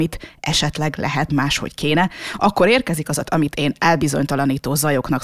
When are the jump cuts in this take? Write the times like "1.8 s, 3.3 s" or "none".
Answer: 1.3 s, 3.2 s